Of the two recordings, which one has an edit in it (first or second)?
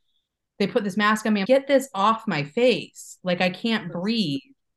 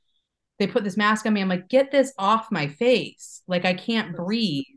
first